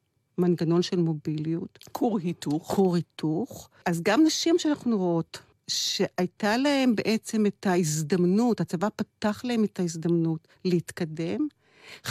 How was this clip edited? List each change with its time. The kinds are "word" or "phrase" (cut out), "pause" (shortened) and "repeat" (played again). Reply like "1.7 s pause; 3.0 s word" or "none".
none